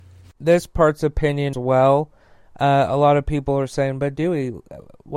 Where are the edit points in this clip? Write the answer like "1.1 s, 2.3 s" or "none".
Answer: 1.5 s

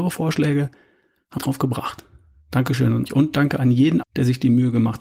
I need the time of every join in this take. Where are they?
1.4 s, 3.1 s, 4.0 s

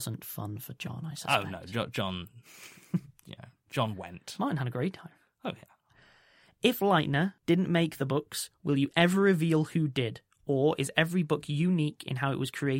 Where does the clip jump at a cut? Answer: none

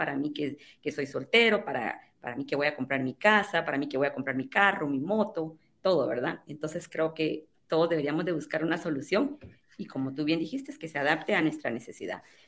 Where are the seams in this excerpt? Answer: none

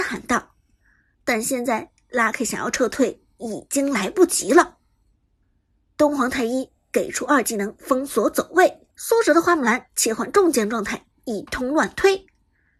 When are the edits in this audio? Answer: 8.9 s

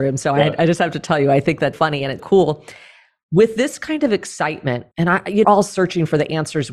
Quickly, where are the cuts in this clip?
1.7 s, 2.2 s, 4.9 s, 5.4 s

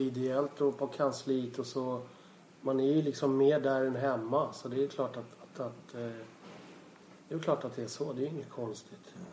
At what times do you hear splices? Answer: none

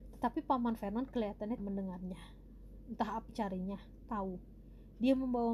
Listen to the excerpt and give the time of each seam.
1.6 s, 3.3 s, 4.1 s

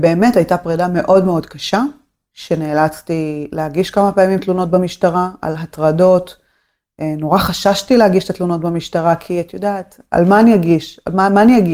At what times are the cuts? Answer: none

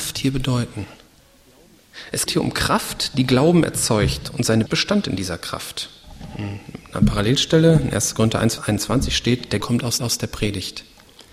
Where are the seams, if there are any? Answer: 2.3 s, 4.7 s, 8.6 s, 9.6 s, 10.0 s

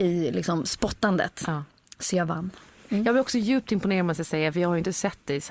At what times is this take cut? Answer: none

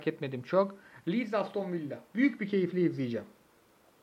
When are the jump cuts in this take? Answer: none

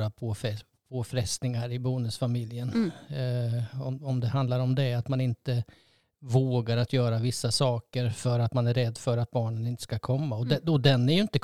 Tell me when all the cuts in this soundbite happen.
none

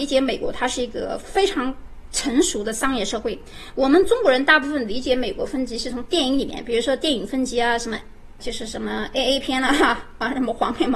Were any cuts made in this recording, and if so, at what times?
8.4 s

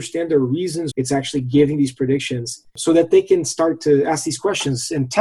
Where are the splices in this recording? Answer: 0.9 s

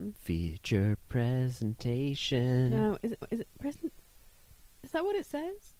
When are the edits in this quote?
3.2 s

